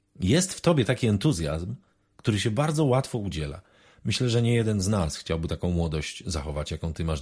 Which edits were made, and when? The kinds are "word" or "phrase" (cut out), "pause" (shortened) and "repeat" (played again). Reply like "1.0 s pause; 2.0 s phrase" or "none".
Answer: none